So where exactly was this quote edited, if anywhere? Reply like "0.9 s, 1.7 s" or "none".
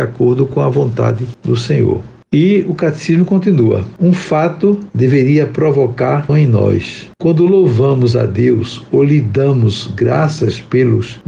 6.3 s